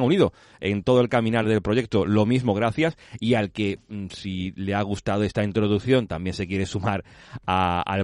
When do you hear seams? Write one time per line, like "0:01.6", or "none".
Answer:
none